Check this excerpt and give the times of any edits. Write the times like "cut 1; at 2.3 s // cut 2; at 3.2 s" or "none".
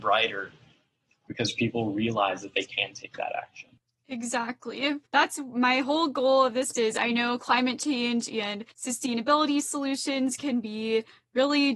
cut 1; at 5.1 s // cut 2; at 6.7 s // cut 3; at 8.7 s